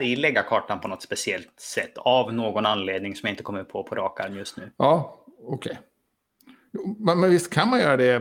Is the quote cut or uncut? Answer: uncut